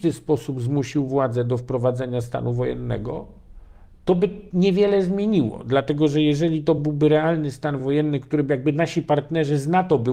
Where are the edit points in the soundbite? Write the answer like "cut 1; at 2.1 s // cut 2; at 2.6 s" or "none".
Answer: none